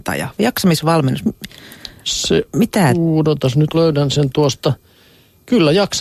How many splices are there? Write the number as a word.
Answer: one